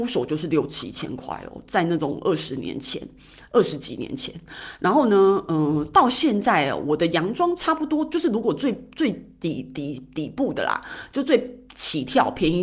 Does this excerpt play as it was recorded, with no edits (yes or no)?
yes